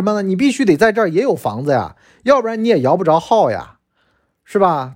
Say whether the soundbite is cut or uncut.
uncut